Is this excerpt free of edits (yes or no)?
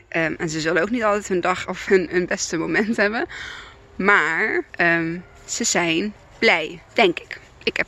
no